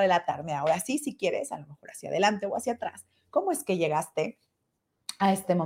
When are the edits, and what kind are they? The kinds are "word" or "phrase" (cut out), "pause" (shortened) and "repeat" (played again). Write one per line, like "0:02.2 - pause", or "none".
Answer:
none